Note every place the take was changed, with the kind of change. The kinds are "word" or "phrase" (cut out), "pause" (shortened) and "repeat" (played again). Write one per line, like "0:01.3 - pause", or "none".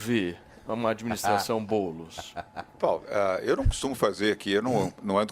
none